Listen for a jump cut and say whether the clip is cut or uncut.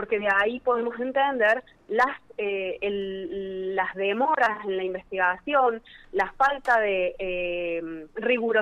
uncut